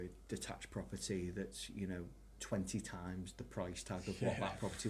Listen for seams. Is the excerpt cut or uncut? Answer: uncut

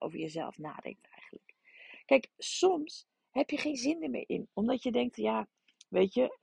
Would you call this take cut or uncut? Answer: uncut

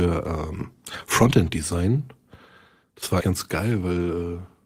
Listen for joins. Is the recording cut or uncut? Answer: cut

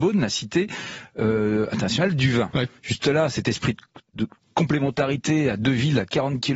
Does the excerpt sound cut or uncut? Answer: uncut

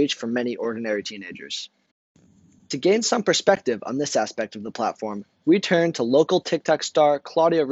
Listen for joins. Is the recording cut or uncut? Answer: uncut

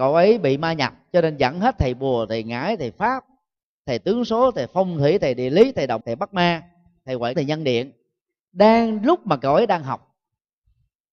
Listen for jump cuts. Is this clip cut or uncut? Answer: cut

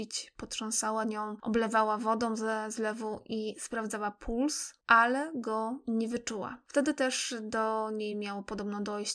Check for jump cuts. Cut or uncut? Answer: uncut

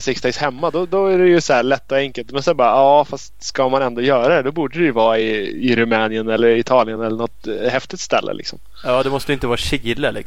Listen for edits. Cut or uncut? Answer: uncut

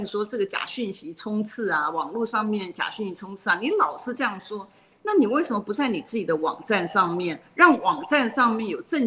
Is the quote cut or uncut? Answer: uncut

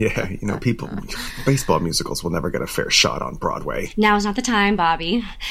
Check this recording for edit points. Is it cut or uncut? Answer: uncut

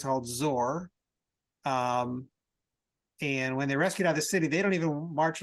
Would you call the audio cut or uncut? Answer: uncut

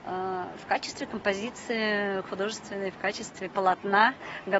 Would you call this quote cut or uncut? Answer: uncut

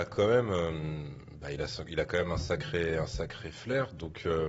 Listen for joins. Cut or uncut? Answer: uncut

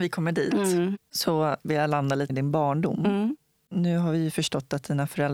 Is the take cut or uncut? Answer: cut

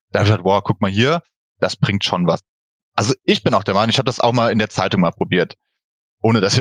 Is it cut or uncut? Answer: uncut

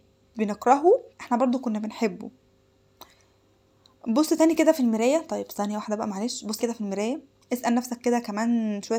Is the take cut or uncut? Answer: cut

